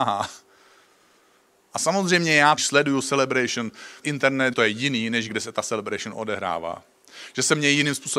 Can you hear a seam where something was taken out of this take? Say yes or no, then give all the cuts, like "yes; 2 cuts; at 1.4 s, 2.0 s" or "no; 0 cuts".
yes; 4 cuts; at 2.6 s, 4.0 s, 4.5 s, 5.3 s